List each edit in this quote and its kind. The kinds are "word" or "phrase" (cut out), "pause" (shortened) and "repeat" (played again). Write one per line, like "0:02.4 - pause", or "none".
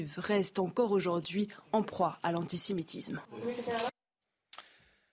none